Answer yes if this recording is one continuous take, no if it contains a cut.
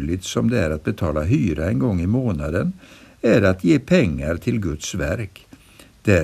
yes